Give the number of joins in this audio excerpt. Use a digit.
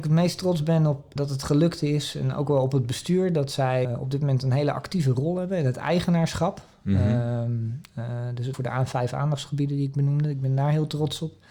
3